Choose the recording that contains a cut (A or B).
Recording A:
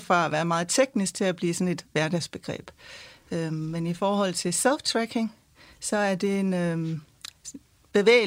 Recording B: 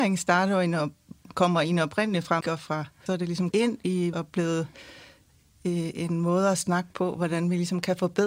B